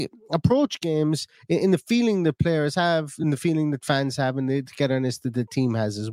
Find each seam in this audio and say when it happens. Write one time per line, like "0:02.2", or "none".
none